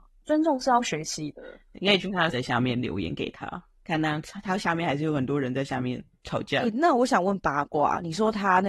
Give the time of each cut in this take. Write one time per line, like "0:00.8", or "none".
0:02.3